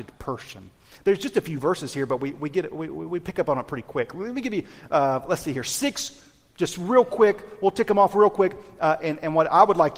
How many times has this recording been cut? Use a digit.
0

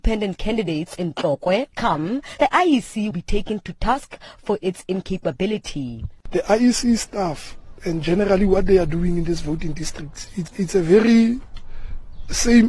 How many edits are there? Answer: 4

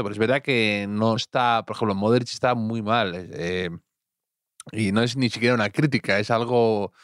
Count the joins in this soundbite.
1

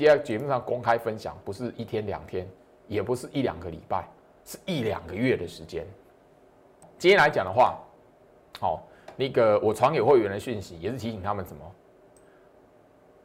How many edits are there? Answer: 0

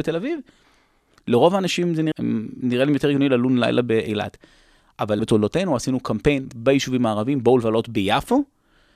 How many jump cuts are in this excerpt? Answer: 3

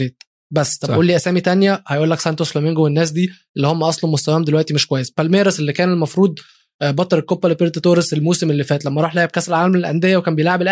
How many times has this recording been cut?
0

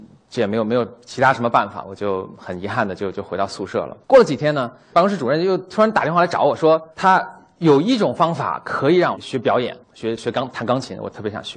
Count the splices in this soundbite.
2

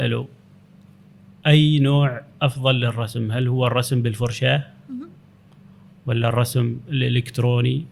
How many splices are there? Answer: 0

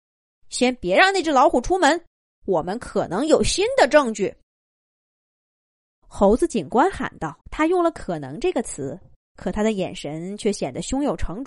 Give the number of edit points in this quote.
4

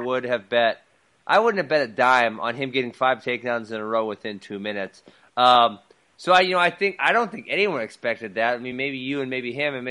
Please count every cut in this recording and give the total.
0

